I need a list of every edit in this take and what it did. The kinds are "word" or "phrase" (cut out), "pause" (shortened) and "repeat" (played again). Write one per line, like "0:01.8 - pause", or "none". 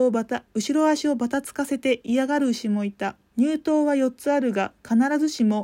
0:03.3 - pause